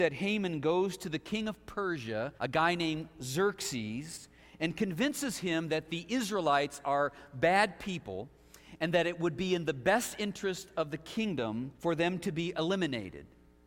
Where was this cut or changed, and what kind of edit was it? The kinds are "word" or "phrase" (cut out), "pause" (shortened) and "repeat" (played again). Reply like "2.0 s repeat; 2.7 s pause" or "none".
2.4 s pause; 11.7 s pause